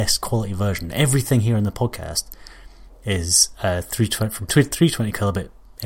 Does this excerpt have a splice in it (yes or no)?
no